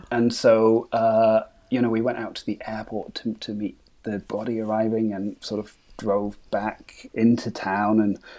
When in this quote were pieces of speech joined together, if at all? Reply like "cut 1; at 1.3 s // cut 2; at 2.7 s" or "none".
cut 1; at 4.3 s